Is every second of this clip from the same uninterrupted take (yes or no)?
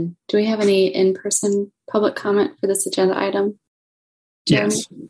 yes